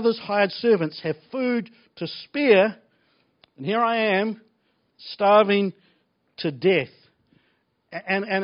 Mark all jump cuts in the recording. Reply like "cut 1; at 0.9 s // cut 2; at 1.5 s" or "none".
none